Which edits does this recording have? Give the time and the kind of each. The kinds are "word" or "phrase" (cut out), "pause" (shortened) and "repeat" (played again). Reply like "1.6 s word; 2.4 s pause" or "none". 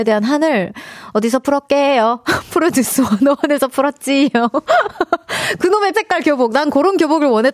5.9 s word